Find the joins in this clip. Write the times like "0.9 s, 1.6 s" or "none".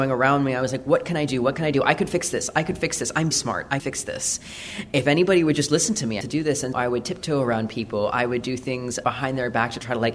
3.3 s, 3.8 s, 6.2 s, 6.7 s, 9.0 s